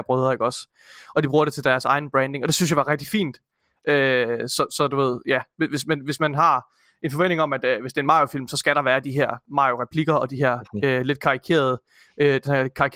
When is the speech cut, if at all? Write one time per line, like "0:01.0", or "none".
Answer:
none